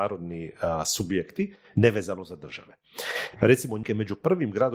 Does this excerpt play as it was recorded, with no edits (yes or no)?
no